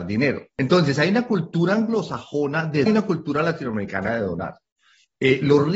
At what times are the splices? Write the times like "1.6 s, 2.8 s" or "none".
2.9 s